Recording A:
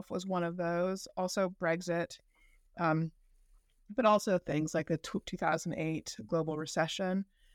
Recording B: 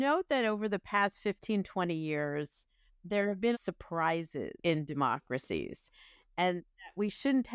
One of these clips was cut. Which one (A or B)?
B